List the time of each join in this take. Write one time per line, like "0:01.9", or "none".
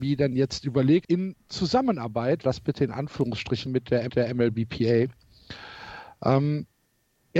0:01.0
0:02.4
0:03.7
0:04.1